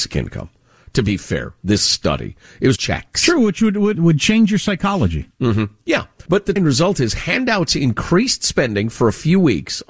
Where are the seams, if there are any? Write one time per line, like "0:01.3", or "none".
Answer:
0:02.8
0:03.9
0:05.3
0:06.3
0:06.6